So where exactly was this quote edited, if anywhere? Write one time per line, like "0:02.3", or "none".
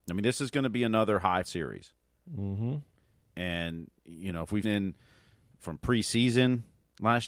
0:01.4
0:04.6